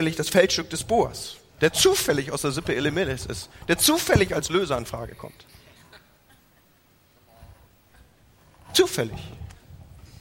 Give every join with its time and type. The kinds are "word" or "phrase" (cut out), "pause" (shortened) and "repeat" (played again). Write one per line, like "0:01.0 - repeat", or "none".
none